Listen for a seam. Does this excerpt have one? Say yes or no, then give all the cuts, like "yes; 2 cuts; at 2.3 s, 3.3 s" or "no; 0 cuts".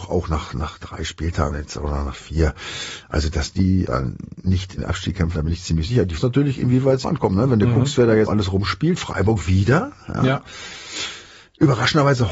yes; 8 cuts; at 1.5 s, 3.3 s, 3.9 s, 4.8 s, 5.3 s, 6.2 s, 7.0 s, 8.3 s